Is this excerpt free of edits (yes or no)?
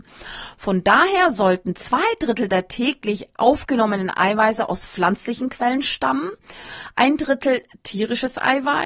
yes